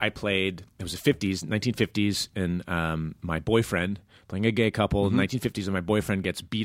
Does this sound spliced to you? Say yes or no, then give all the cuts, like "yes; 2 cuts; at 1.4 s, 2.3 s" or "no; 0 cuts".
no; 0 cuts